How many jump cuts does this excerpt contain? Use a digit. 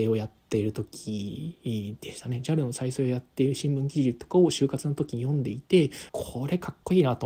1